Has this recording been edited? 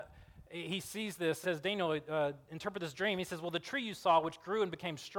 yes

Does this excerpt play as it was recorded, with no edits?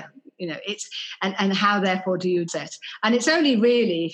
no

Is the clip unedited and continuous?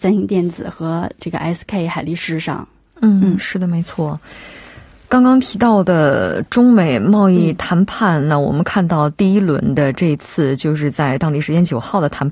yes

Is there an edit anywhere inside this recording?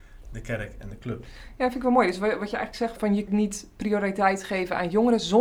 yes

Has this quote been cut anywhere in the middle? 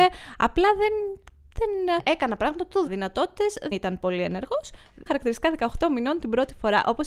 yes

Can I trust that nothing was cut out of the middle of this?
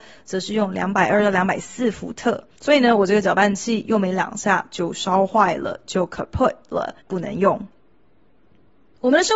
no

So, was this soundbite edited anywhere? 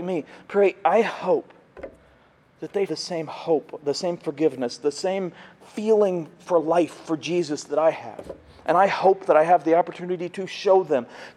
yes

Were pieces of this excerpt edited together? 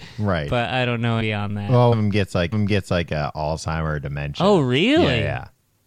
yes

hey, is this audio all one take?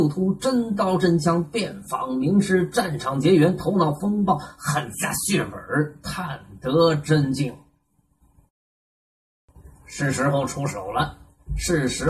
no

